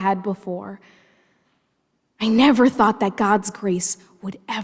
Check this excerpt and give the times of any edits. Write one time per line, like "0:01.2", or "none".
none